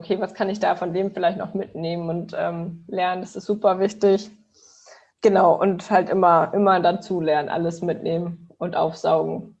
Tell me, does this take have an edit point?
no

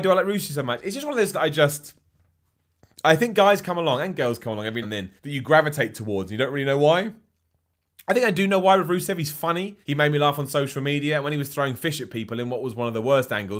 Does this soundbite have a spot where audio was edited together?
yes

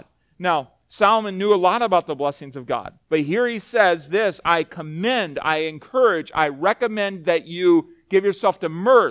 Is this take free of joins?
no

